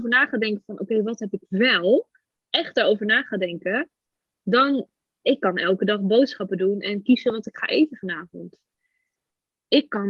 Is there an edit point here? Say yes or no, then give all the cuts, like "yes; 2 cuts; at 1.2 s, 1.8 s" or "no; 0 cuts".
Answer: no; 0 cuts